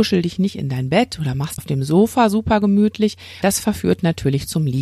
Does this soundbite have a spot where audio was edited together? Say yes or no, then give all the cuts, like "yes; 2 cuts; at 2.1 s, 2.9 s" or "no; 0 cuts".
yes; 2 cuts; at 1.6 s, 3.4 s